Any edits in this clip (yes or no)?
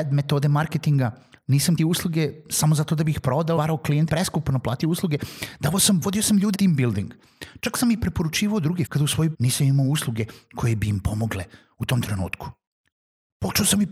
yes